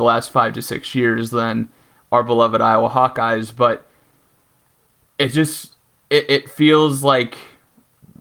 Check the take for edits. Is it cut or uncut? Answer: uncut